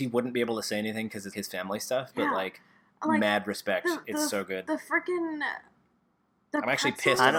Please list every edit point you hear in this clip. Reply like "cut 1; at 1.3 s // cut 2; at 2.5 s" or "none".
cut 1; at 1.3 s